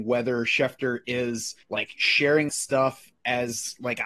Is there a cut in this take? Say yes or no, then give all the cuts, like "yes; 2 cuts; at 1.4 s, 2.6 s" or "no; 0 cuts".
yes; 2 cuts; at 1.6 s, 2.5 s